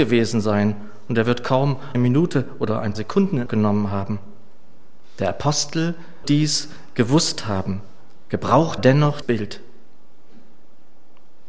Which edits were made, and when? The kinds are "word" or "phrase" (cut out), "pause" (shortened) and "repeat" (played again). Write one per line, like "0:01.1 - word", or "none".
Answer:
0:01.9 - word
0:02.9 - word
0:03.5 - word
0:06.2 - word
0:08.8 - word
0:09.2 - word